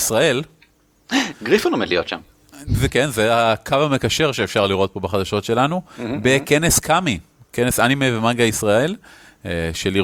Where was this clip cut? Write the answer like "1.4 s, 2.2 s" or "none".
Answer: 2.9 s